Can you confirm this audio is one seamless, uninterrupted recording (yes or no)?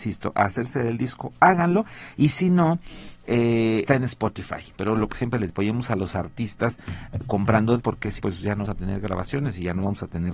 no